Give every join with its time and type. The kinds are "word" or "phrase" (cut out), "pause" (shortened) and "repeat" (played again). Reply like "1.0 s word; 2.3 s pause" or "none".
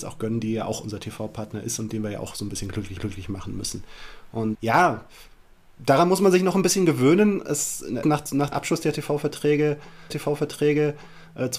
3.0 s repeat; 4.5 s word; 8.0 s word; 8.5 s word; 10.1 s repeat